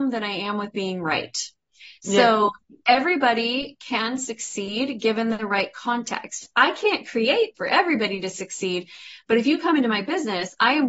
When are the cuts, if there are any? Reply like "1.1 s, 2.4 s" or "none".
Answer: 7.6 s